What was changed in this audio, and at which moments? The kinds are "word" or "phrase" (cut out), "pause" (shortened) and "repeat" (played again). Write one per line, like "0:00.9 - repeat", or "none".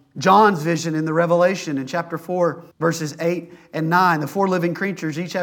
0:02.7 - pause